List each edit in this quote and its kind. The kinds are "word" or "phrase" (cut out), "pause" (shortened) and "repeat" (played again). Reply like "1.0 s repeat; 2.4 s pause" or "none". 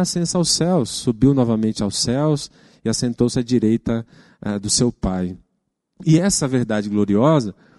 none